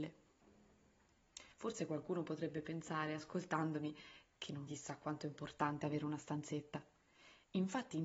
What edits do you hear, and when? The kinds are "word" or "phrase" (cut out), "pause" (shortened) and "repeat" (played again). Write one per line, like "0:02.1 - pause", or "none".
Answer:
0:01.5 - pause
0:04.7 - word